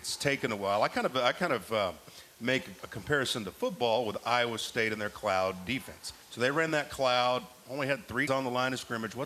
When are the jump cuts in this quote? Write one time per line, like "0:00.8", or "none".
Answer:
0:02.8
0:06.2
0:08.3